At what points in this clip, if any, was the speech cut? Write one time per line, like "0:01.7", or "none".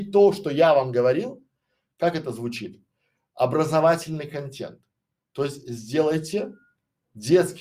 none